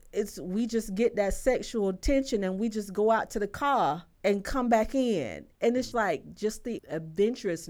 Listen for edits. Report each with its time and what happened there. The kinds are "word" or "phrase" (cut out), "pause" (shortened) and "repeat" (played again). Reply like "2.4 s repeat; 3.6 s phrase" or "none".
4.1 s pause; 5.9 s word; 6.8 s word

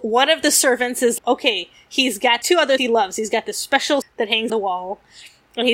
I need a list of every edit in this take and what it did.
1.2 s word; 2.4 s word; 2.8 s word; 4.0 s word; 4.5 s word

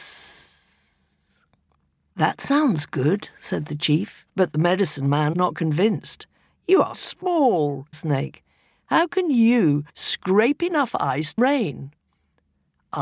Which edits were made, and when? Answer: 4.3 s pause; 5.3 s word; 6.9 s word; 7.9 s phrase; 9.9 s pause; 11.4 s word

